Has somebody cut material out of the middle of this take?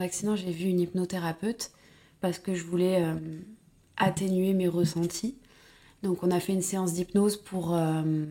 no; 0 cuts

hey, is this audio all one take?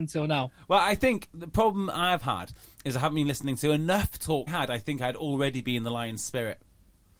no; 1 cut; at 4.5 s

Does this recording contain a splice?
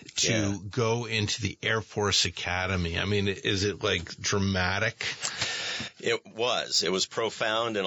no; 0 cuts

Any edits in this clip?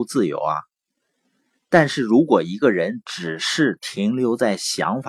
no; 0 cuts

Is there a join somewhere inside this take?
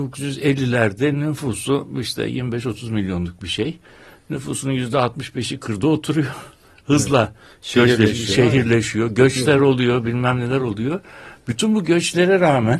no; 0 cuts

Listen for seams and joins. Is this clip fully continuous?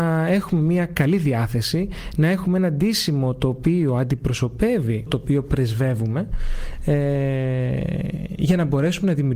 no; 1 cut; at 5.1 s

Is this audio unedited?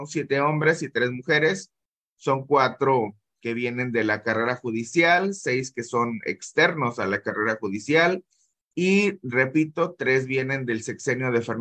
yes; 0 cuts

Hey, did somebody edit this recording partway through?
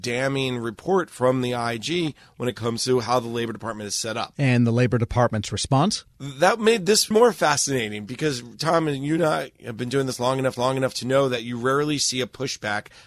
yes; 2 cuts; at 7.1 s, 10.6 s

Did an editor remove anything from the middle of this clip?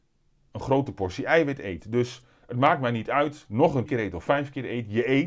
yes; 1 cut; at 3.9 s

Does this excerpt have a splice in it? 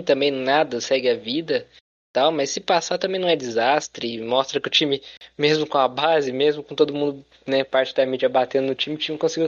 no; 0 cuts

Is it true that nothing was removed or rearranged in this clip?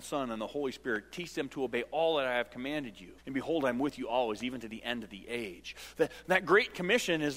no; 1 cut; at 3.2 s

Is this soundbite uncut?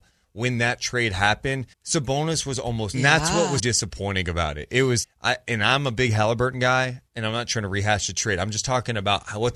no; 5 cuts; at 1.7 s, 2.9 s, 3.6 s, 5.0 s, 7.1 s

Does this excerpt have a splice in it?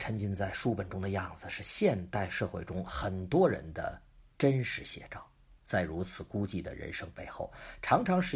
yes; 1 cut; at 5.6 s

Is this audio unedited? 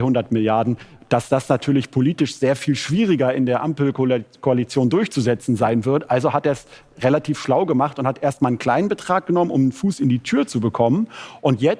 yes; 0 cuts

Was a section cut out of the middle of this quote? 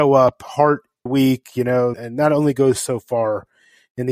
yes; 2 cuts; at 1.1 s, 1.9 s

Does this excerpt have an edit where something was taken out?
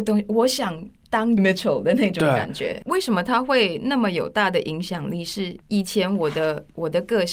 yes; 2 cuts; at 1.4 s, 5.6 s

